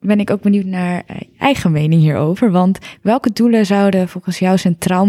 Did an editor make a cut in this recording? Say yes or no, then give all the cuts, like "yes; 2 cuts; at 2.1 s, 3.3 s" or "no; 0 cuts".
no; 0 cuts